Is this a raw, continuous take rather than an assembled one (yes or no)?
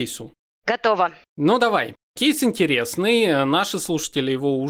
yes